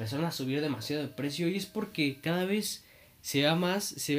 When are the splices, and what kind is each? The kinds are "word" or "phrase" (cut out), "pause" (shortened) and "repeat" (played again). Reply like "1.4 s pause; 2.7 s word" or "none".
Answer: none